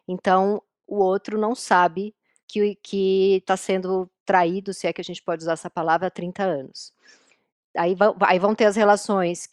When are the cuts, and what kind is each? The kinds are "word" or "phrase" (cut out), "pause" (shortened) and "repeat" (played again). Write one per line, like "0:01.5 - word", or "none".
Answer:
none